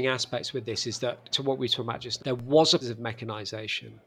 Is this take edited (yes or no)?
yes